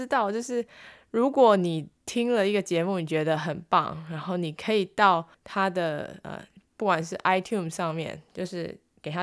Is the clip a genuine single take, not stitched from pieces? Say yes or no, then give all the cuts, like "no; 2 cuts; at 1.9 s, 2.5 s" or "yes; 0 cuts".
no; 1 cut; at 5.3 s